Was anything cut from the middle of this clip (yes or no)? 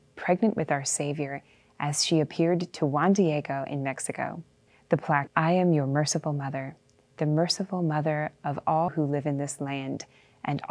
yes